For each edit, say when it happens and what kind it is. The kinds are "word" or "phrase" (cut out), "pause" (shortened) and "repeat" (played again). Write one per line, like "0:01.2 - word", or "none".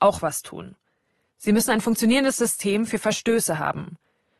none